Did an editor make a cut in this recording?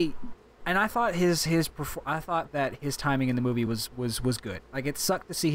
no; 0 cuts

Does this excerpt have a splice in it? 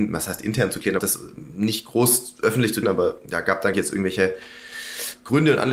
yes; 3 cuts; at 1.0 s, 2.8 s, 3.7 s

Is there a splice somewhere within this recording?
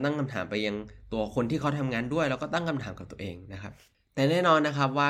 no; 0 cuts

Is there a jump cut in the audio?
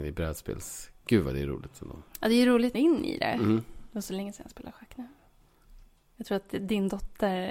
yes; 2 cuts; at 1.0 s, 2.7 s

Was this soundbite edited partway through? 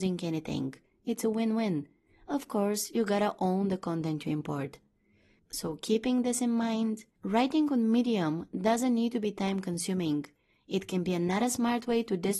no; 0 cuts

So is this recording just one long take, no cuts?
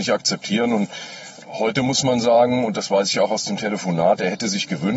yes; 0 cuts

